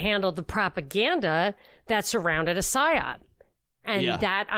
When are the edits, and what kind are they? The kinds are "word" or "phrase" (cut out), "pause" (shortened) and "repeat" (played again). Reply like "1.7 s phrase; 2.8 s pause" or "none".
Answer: none

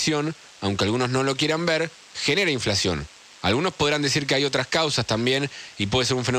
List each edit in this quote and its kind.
none

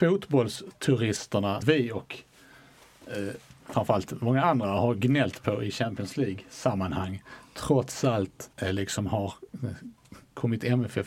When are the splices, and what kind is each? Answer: 1.6 s phrase; 3.6 s pause; 8.5 s pause

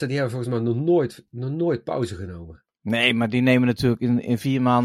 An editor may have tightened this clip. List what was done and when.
2.7 s pause

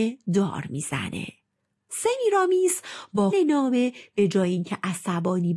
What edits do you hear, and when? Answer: 3.3 s word

